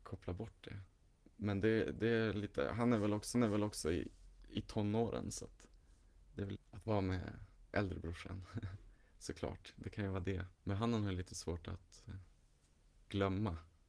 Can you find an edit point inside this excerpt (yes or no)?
yes